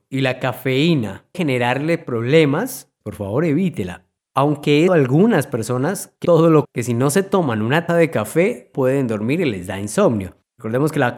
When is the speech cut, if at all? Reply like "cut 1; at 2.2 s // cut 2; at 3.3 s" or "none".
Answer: cut 1; at 1.3 s // cut 2; at 3.0 s // cut 3; at 4.9 s // cut 4; at 6.2 s // cut 5; at 6.6 s // cut 6; at 7.9 s // cut 7; at 8.7 s